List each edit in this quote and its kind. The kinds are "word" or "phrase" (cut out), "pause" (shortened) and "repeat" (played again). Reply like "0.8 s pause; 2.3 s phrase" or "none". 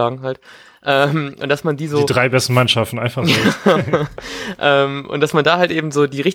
none